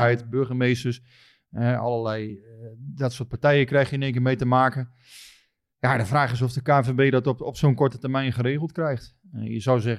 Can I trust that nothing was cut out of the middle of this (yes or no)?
yes